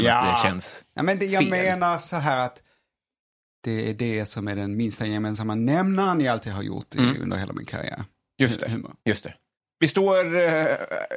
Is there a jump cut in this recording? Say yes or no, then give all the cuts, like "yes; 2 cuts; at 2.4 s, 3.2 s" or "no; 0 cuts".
yes; 1 cut; at 9.0 s